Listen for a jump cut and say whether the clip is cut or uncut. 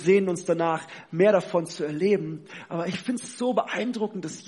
uncut